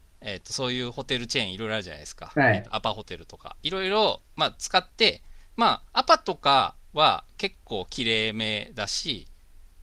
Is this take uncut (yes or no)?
no